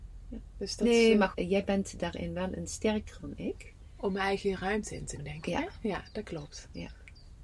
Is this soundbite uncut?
no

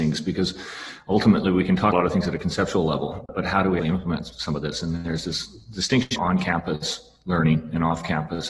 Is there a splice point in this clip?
yes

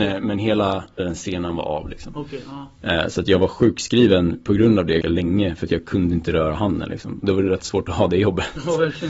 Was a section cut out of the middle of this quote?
yes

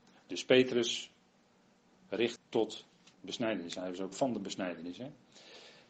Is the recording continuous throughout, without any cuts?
no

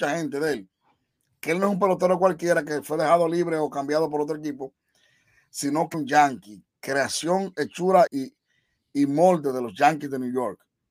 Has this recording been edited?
yes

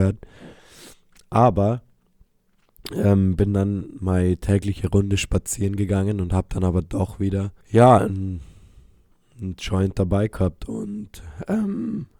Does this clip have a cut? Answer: yes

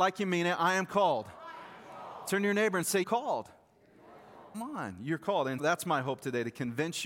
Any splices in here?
yes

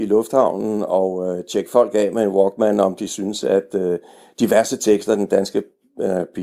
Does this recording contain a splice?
no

